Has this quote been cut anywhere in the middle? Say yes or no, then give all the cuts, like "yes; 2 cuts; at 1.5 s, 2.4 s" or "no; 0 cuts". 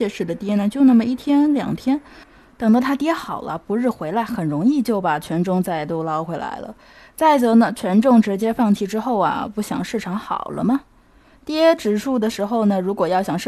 no; 0 cuts